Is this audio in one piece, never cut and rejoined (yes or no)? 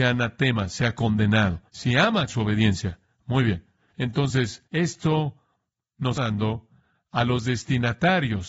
no